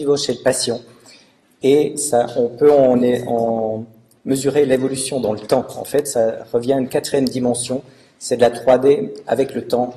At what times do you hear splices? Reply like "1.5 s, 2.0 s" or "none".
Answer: none